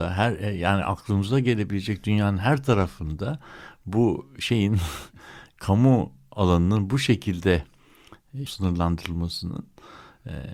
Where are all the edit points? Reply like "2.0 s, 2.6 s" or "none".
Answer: 8.5 s

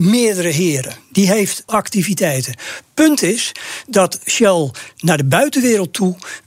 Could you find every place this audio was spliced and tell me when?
1.7 s

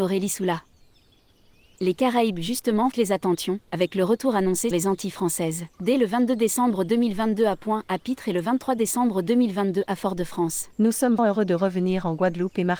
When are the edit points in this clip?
2.9 s, 3.6 s, 4.7 s, 5.7 s, 10.7 s, 11.2 s

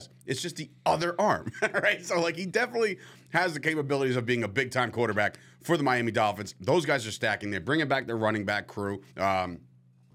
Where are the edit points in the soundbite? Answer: 9.1 s

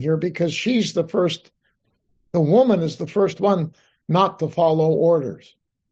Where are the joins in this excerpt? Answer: none

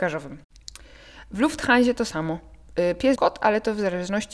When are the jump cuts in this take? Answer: 3.2 s

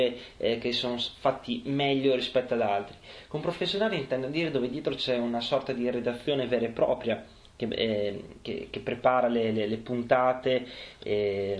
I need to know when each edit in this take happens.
none

